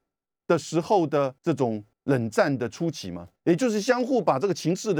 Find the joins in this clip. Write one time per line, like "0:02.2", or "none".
0:01.4
0:01.9
0:03.4